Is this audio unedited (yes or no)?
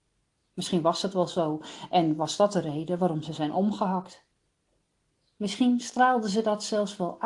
yes